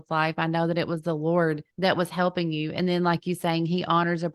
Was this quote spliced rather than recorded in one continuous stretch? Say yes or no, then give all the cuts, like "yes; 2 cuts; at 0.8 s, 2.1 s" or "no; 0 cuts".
yes; 1 cut; at 1.7 s